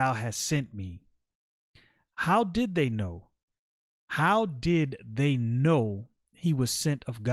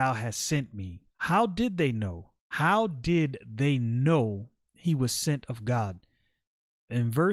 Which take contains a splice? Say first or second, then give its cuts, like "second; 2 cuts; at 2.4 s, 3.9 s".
second; 2 cuts; at 1.1 s, 2.4 s